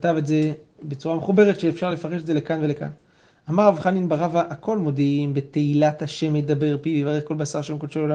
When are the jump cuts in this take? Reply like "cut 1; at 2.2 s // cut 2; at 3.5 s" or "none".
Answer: none